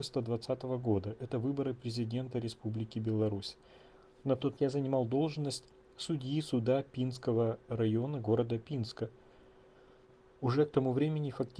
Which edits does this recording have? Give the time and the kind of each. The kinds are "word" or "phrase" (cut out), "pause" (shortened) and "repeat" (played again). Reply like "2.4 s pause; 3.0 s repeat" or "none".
4.6 s word